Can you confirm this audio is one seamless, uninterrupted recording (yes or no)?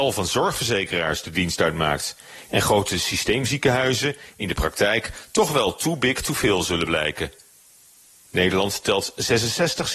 yes